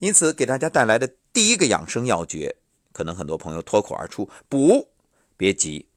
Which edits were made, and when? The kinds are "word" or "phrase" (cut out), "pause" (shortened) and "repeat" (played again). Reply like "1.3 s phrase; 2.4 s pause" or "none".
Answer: 2.6 s pause